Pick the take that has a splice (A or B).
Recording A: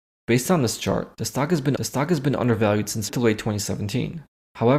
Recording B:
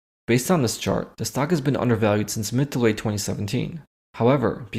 A